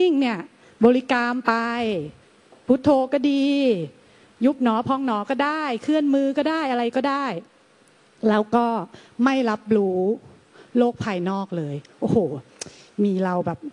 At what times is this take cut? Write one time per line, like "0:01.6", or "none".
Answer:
none